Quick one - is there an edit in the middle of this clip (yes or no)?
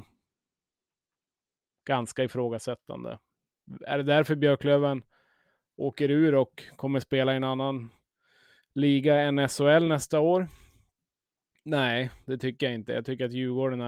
no